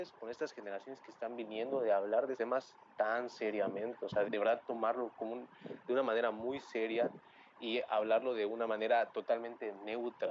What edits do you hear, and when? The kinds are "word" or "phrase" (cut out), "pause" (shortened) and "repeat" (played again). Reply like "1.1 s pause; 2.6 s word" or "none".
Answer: 2.3 s word; 4.2 s word